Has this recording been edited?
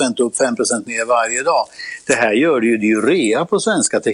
no; 0 cuts

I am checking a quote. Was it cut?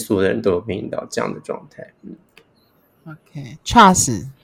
no; 0 cuts

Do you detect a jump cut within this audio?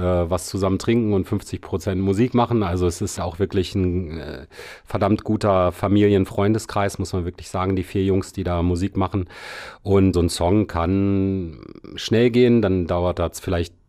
yes; 2 cuts; at 3.2 s, 10.1 s

